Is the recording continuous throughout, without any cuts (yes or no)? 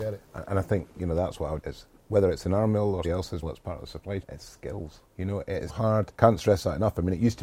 no